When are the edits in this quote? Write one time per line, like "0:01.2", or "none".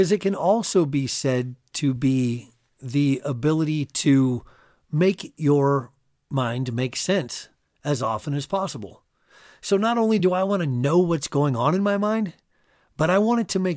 none